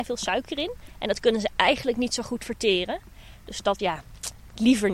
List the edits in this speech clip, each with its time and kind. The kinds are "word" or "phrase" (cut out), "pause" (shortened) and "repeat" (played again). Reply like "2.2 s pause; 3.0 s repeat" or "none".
3.8 s word

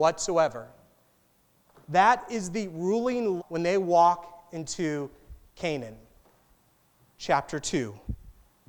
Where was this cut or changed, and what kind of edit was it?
3.4 s word

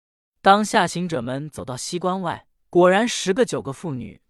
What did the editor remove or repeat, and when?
2.5 s pause

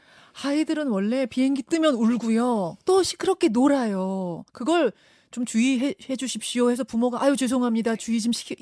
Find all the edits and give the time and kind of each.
2.8 s pause; 4.5 s pause

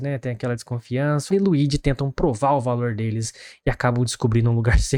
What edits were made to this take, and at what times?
1.3 s word

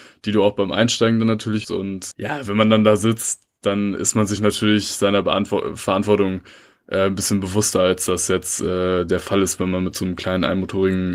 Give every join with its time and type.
1.6 s word; 2.1 s word

